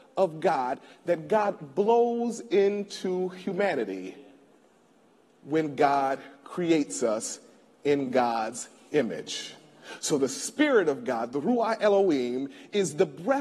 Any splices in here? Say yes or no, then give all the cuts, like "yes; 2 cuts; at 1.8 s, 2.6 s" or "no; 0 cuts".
no; 0 cuts